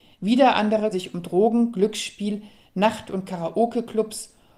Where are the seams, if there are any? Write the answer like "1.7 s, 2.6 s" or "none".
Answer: 0.9 s